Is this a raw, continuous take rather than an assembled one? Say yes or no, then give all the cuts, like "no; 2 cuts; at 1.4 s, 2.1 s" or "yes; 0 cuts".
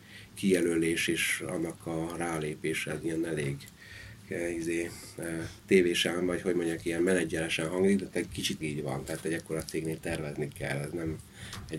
no; 2 cuts; at 5.6 s, 8.6 s